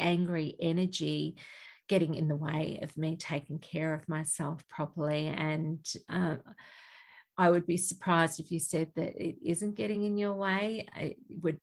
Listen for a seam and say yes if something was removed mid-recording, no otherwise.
no